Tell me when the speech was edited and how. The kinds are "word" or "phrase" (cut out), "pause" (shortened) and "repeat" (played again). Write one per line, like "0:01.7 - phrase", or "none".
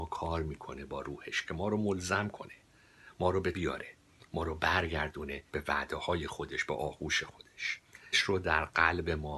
0:03.5 - word
0:05.5 - pause
0:08.1 - phrase